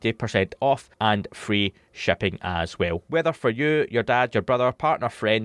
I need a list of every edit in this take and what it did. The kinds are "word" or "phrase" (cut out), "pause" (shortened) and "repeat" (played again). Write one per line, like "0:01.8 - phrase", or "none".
0:00.9 - pause